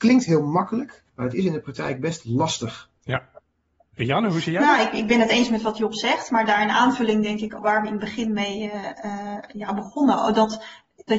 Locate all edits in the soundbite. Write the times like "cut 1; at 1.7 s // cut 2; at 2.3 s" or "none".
cut 1; at 1.1 s // cut 2; at 3.0 s // cut 3; at 7.6 s // cut 4; at 9.5 s